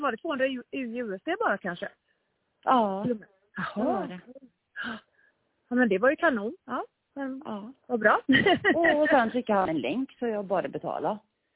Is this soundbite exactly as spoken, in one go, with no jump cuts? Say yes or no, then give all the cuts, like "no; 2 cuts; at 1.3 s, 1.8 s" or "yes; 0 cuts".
yes; 0 cuts